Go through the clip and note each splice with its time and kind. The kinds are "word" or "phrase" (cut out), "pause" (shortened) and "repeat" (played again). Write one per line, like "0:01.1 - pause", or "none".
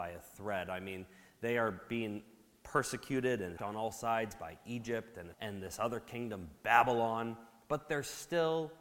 0:03.6 - word
0:05.3 - word